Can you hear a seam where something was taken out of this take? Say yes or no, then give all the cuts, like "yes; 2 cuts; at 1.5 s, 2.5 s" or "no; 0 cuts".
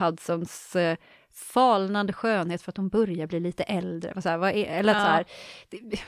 no; 0 cuts